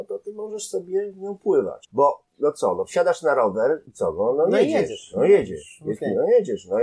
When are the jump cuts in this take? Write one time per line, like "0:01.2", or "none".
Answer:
none